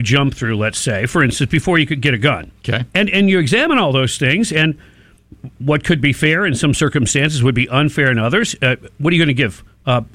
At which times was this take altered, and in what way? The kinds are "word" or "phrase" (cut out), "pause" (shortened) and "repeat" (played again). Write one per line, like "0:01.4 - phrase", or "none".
0:02.9 - pause

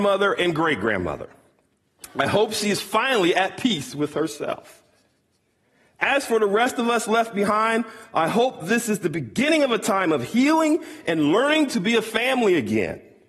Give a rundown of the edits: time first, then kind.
none

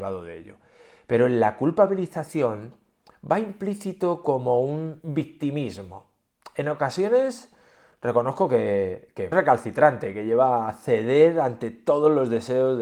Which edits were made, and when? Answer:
0:09.3 - word

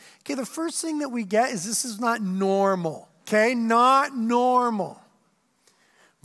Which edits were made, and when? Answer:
0:03.2 - pause

